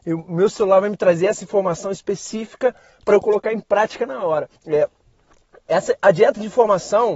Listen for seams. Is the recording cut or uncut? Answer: cut